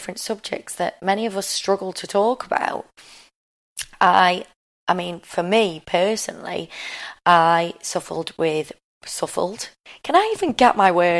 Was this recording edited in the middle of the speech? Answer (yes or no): no